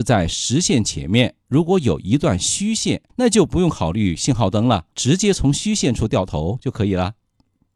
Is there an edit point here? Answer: yes; 2 cuts; at 3.1 s, 4.9 s

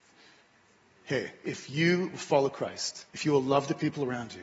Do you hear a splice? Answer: yes; 1 cut; at 3.1 s

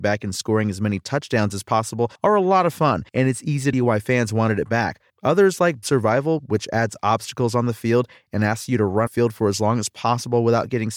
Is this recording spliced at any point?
yes; 6 cuts; at 2.2 s, 3.1 s, 3.7 s, 5.1 s, 5.8 s, 9.1 s

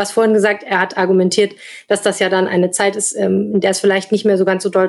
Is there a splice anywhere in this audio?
no; 0 cuts

